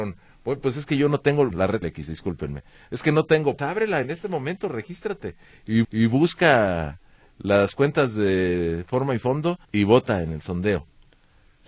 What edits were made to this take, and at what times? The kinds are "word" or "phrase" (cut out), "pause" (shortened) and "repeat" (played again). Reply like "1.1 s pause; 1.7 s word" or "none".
1.5 s word; 1.8 s word; 3.6 s word; 5.8 s repeat; 9.6 s pause

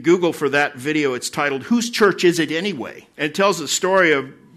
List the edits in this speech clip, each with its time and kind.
3.1 s pause

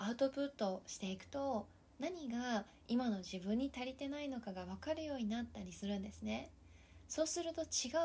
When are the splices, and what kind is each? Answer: none

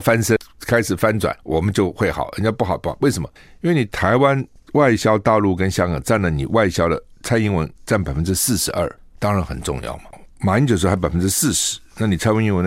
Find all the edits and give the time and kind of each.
1.4 s pause; 7.8 s pause

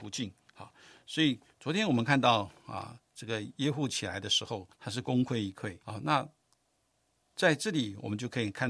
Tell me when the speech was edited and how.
4.7 s pause; 5.8 s pause

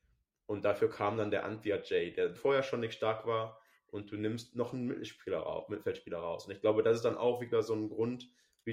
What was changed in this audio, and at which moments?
2.4 s word

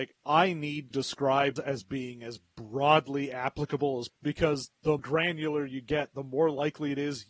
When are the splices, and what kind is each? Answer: 0.9 s word; 1.6 s word; 4.1 s word; 5.0 s word

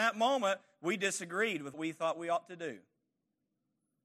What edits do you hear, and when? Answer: 1.7 s word

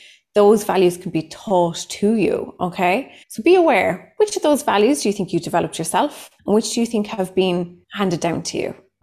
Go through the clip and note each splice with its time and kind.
3.2 s pause; 6.4 s pause; 7.8 s pause

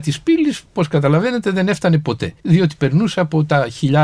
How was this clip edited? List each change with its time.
2.4 s pause

